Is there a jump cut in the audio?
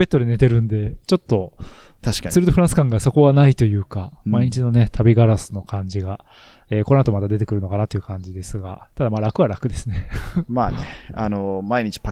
no; 0 cuts

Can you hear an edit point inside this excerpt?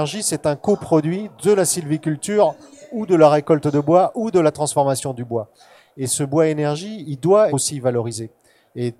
yes; 1 cut; at 7.5 s

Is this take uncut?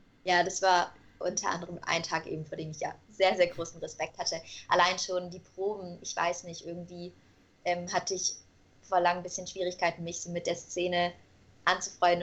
yes; 0 cuts

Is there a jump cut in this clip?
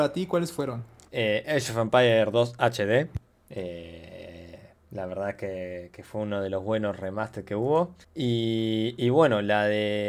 yes; 1 cut; at 8.0 s

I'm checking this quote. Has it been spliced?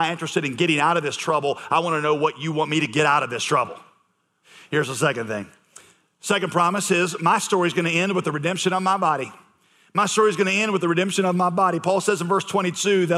no; 0 cuts

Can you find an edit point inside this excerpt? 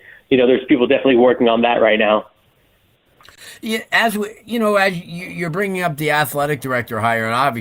no; 0 cuts

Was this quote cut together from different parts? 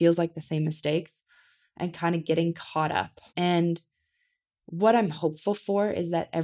yes; 1 cut; at 3.3 s

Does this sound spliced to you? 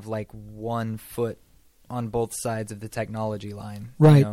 no; 0 cuts

